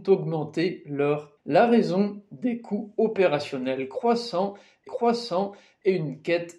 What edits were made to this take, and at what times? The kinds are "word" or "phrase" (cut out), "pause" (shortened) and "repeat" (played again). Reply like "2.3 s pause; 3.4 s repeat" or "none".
1.4 s word; 4.9 s repeat

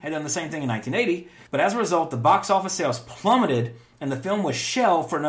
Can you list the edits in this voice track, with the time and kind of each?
1.5 s pause

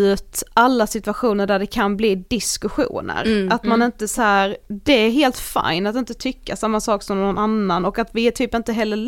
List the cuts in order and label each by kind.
none

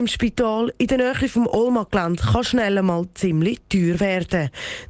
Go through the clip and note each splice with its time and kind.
none

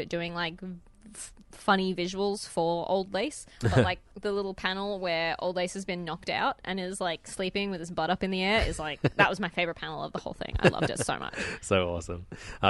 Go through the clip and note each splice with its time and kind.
4.1 s pause

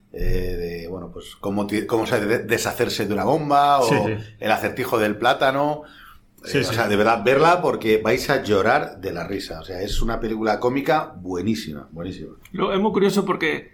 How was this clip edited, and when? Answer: none

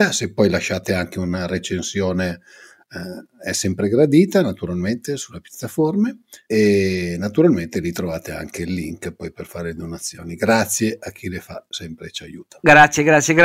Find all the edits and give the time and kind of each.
none

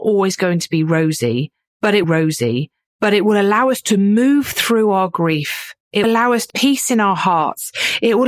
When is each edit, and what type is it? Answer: 2.0 s repeat; 6.0 s word; 6.5 s word

